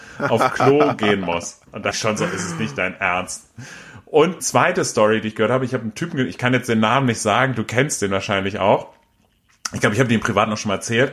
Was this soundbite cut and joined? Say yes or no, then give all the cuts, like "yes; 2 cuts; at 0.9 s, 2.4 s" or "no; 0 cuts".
yes; 2 cuts; at 1.9 s, 4.4 s